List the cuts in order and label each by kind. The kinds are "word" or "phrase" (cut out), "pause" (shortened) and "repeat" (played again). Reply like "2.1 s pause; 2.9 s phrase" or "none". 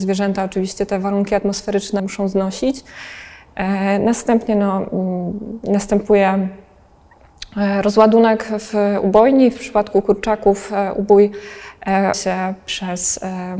2.0 s word; 12.1 s word

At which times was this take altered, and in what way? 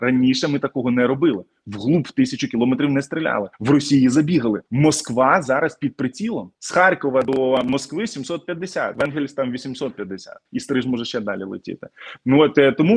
3.5 s pause; 4.7 s pause; 6.5 s pause; 10.5 s pause

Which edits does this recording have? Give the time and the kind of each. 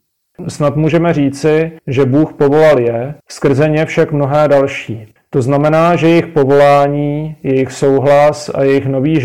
1.8 s pause; 3.2 s pause; 5.2 s pause

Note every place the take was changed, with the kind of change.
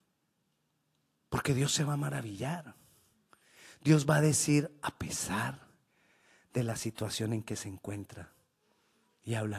none

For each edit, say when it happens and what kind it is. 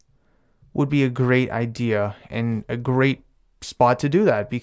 none

